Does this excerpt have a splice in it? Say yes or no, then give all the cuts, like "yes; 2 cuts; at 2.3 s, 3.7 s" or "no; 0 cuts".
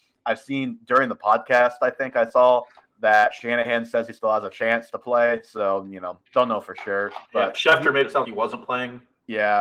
yes; 3 cuts; at 2.8 s, 7.3 s, 8.2 s